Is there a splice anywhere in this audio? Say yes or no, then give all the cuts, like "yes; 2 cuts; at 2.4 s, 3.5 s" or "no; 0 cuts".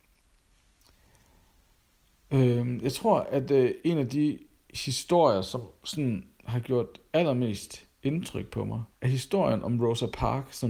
yes; 1 cut; at 8.9 s